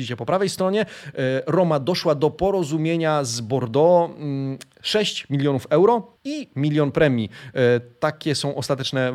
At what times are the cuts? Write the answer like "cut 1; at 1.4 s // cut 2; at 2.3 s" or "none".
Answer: cut 1; at 6.2 s